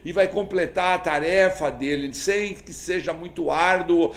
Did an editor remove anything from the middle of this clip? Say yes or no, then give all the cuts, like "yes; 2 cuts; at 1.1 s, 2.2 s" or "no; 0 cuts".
no; 0 cuts